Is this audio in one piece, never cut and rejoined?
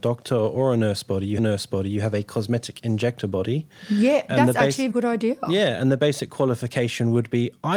no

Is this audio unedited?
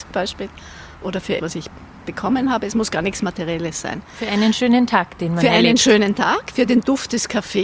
no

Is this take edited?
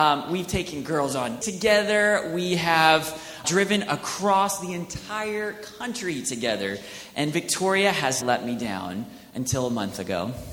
yes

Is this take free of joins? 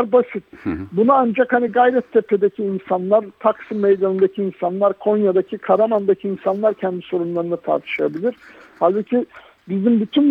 yes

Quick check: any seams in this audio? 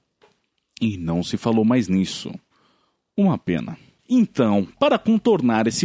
no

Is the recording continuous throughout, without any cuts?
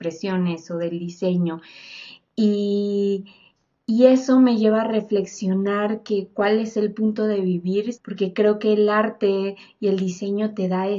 no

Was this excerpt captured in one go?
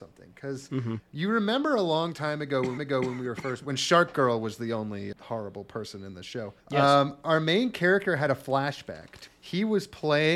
no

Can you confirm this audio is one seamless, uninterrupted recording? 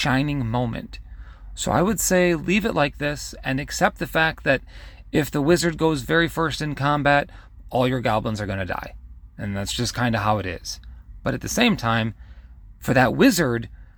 yes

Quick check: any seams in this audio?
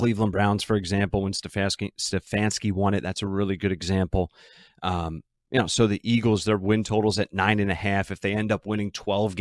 no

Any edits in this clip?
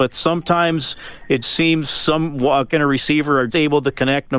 yes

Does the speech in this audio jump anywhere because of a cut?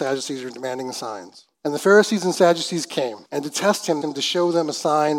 yes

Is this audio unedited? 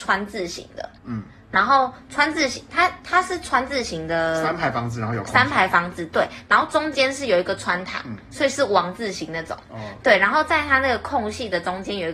no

